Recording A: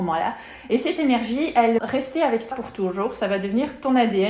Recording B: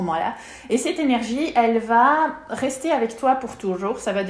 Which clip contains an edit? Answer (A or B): A